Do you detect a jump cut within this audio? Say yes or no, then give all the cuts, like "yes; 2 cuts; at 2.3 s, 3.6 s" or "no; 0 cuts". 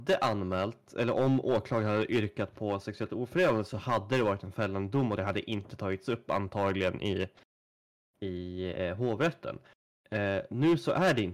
no; 0 cuts